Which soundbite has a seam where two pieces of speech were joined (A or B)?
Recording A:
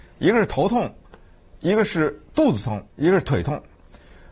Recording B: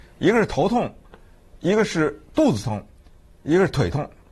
A